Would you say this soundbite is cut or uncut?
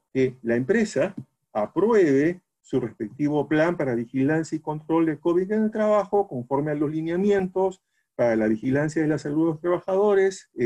uncut